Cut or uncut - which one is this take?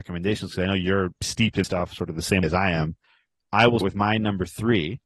cut